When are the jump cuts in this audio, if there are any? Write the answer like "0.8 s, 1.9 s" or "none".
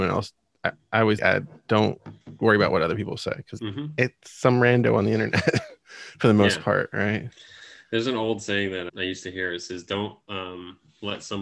1.2 s, 3.6 s, 8.9 s

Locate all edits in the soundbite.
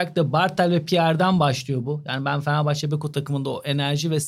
none

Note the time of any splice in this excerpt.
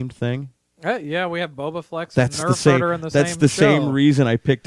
none

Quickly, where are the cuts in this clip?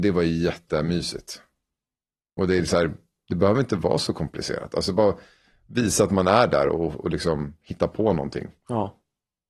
none

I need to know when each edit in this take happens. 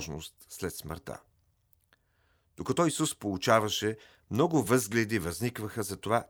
none

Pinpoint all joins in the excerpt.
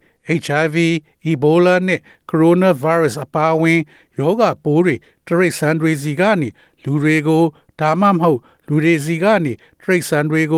none

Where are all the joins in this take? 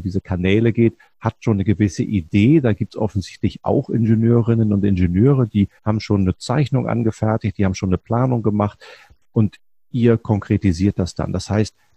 5.8 s

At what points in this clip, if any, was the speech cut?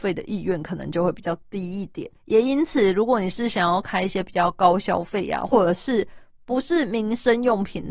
2.2 s

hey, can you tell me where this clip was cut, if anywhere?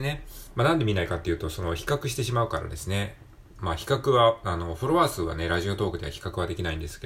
none

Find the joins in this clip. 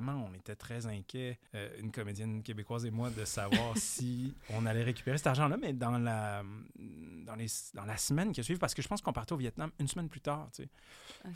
1.5 s

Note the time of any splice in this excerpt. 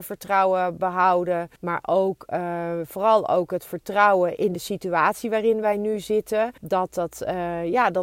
1.6 s, 4.4 s, 6.6 s

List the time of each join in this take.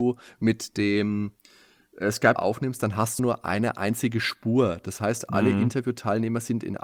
2.4 s, 3.2 s

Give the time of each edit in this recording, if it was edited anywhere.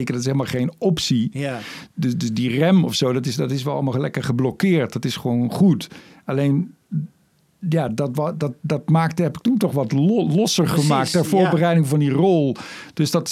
none

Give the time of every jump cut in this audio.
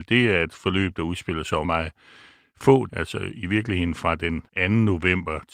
1.6 s, 2.9 s, 4.5 s

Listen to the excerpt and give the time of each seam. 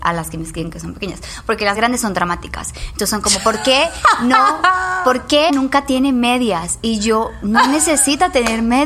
1.7 s, 5.5 s

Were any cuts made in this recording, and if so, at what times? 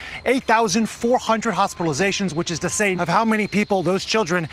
3.0 s

